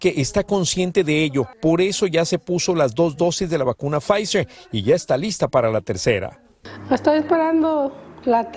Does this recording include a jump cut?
no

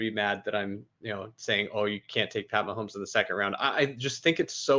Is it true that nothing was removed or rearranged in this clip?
no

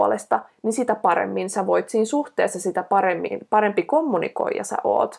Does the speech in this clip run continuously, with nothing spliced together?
yes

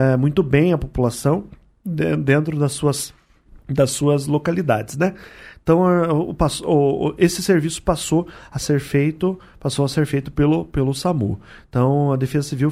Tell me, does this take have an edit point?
yes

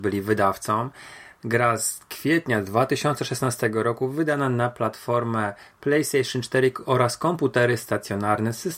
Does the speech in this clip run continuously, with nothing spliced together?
yes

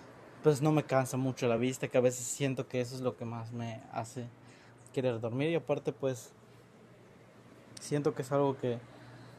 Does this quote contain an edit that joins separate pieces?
no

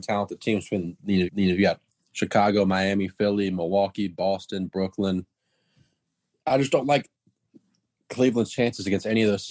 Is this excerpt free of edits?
no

